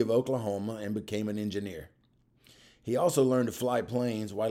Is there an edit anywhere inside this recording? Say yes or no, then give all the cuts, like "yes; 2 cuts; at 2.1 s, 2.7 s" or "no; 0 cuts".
no; 0 cuts